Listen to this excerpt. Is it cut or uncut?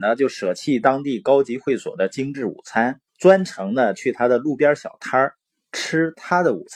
cut